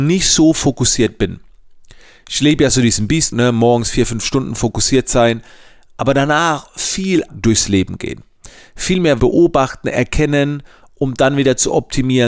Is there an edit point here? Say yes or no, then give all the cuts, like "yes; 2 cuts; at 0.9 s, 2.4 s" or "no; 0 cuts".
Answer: yes; 3 cuts; at 3.3 s, 7.3 s, 9.2 s